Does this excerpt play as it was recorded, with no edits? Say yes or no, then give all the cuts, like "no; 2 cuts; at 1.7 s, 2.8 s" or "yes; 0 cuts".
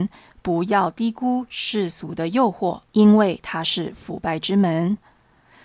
no; 1 cut; at 2.9 s